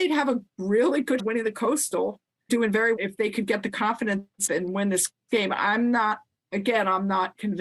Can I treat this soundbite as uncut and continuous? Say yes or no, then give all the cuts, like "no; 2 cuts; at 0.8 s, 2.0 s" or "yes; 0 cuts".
no; 4 cuts; at 1.2 s, 2.5 s, 3.0 s, 4.5 s